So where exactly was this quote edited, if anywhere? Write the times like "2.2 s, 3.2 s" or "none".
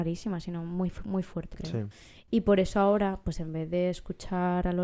1.5 s